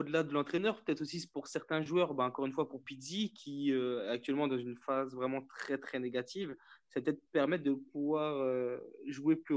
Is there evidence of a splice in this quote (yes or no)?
yes